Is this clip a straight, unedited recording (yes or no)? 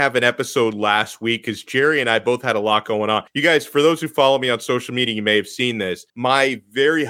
no